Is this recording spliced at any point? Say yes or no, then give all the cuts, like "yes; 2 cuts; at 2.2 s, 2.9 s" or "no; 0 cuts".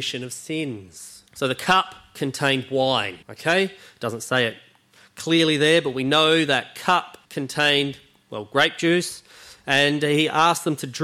yes; 3 cuts; at 1.3 s, 3.2 s, 7.2 s